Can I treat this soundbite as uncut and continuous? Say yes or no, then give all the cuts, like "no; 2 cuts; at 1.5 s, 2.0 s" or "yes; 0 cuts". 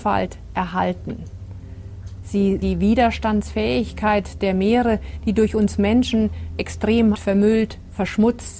no; 2 cuts; at 2.6 s, 7.1 s